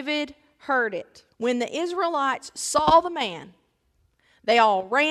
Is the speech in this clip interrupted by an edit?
yes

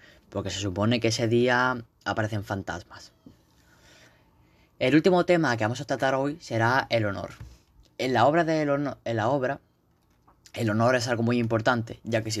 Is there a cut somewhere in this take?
no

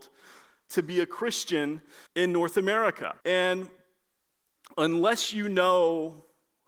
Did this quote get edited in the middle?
yes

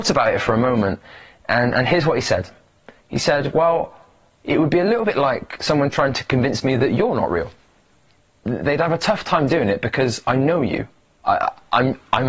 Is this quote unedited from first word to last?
yes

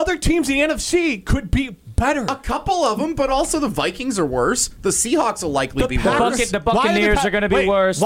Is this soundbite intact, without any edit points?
yes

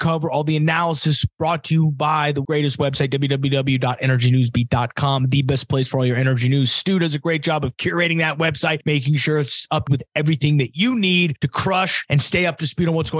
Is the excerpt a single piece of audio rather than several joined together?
no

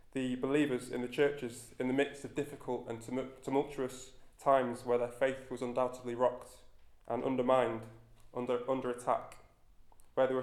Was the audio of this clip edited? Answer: no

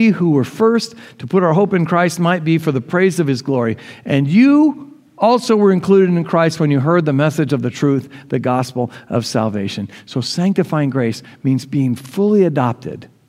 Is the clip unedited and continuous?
yes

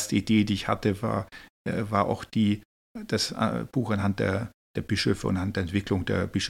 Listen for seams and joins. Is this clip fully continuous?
yes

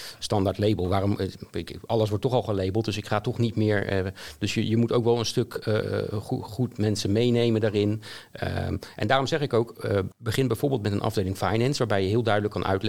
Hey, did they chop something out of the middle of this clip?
yes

